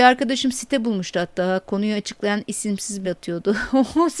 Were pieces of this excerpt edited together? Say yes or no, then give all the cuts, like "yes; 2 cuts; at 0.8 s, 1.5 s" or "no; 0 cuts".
yes; 1 cut; at 3.0 s